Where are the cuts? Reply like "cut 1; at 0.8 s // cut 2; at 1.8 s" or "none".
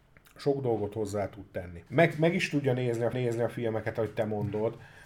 cut 1; at 1.9 s // cut 2; at 3.1 s